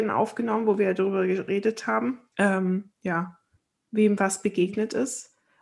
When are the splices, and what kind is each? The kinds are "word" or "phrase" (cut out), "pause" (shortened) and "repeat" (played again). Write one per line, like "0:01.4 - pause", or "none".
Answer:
0:02.3 - pause
0:03.6 - pause